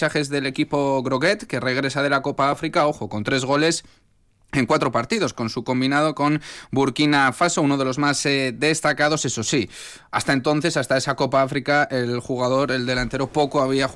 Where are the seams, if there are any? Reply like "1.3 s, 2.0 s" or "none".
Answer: none